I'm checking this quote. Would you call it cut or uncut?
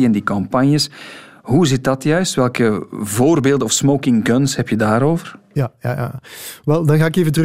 uncut